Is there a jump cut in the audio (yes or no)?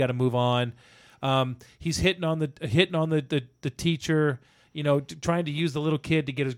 no